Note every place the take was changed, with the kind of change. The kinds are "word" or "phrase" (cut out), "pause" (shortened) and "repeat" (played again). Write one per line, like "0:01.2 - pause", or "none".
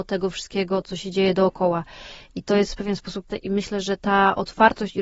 0:03.3 - word
0:04.0 - pause